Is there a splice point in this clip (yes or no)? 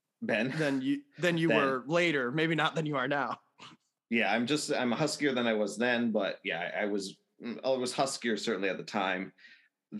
no